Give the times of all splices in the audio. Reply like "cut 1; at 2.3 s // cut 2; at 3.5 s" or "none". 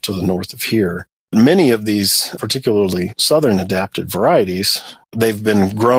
none